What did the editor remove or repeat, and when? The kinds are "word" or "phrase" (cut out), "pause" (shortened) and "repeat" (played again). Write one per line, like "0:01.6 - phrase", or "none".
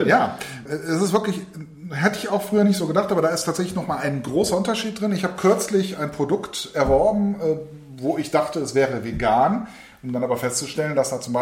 none